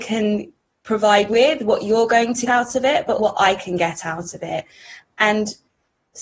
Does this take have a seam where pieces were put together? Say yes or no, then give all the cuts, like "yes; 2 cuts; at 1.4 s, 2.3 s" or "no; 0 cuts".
yes; 3 cuts; at 1.3 s, 2.5 s, 3.2 s